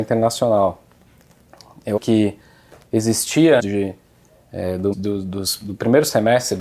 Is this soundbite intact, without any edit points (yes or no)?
no